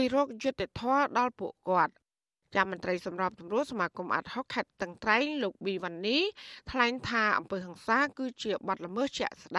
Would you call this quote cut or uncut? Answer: uncut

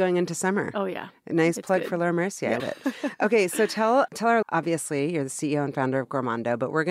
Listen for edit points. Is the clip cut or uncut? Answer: cut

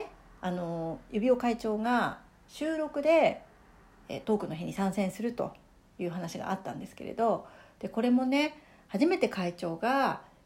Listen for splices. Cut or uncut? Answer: cut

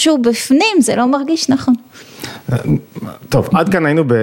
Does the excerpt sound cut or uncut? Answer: uncut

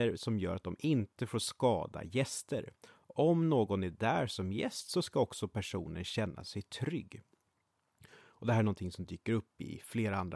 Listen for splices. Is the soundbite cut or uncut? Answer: uncut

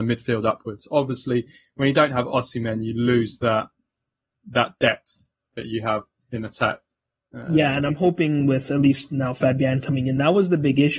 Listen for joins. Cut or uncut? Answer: uncut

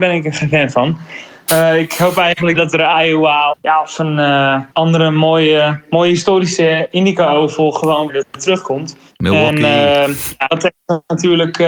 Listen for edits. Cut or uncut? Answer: cut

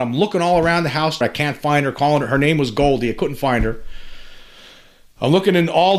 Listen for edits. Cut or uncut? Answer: cut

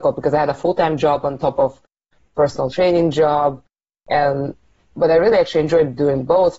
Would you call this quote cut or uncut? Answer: uncut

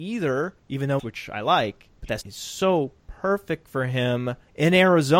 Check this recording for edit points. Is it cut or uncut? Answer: cut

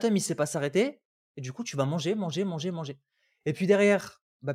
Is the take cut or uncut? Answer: uncut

